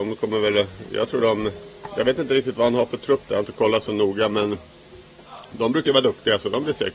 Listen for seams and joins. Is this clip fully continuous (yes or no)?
yes